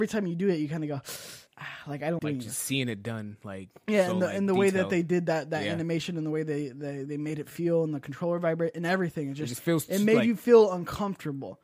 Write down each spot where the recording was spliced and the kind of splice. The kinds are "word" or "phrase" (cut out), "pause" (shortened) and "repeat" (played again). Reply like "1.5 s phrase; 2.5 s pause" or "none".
1.5 s pause; 2.2 s word